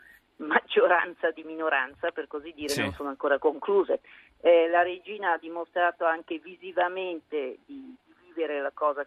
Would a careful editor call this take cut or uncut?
uncut